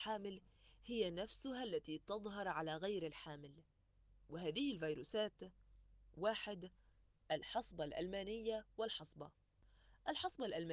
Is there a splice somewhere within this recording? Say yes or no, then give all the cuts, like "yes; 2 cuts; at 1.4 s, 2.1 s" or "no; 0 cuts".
no; 0 cuts